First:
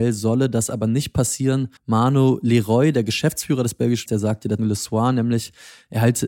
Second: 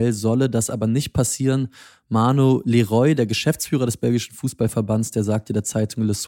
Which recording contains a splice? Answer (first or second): first